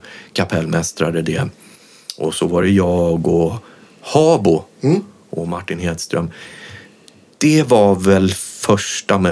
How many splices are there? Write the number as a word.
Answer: zero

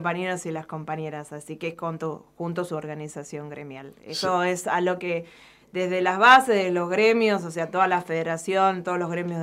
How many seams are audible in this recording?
one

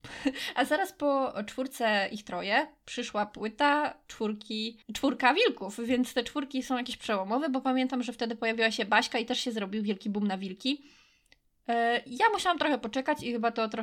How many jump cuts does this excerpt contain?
one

